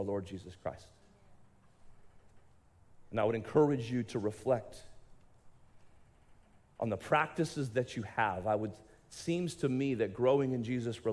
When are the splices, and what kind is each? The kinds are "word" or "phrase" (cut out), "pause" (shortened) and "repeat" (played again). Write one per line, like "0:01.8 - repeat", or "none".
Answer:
none